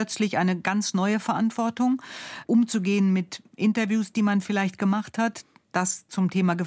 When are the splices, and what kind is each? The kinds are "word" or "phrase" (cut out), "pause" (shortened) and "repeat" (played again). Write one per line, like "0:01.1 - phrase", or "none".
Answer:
none